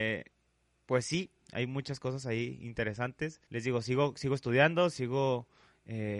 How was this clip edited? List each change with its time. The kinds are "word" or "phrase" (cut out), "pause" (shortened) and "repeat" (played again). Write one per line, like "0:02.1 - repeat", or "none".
0:03.5 - pause